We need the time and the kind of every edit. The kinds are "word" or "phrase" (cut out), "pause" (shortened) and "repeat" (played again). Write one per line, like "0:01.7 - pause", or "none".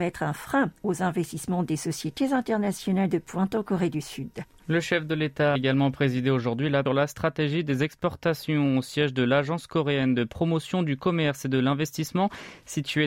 0:05.6 - word
0:06.9 - phrase